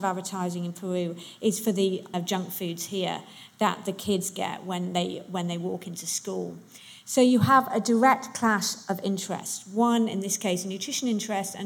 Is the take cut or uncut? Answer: cut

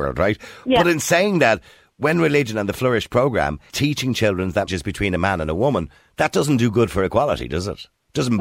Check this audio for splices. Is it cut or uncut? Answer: cut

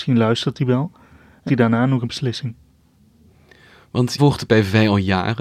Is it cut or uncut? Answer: cut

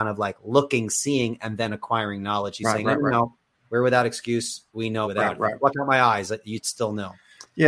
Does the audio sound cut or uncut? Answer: cut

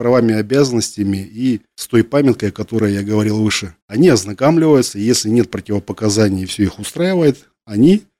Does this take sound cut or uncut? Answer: cut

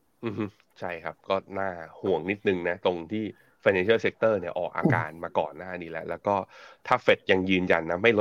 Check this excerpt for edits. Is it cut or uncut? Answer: uncut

